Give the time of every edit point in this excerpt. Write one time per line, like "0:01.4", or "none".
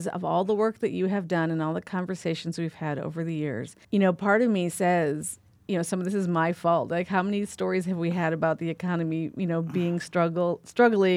0:03.8